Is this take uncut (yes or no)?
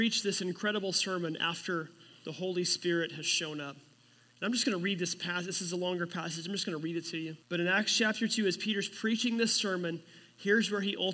no